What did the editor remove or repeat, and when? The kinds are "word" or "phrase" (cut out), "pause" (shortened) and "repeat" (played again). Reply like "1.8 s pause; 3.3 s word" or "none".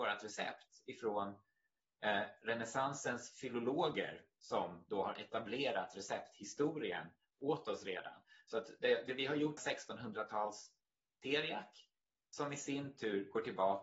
9.6 s phrase

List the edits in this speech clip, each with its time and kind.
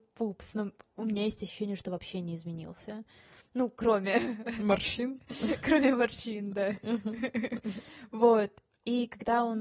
none

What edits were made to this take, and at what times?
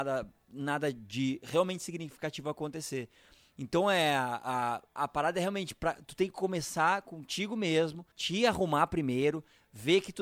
5.0 s word; 8.1 s pause

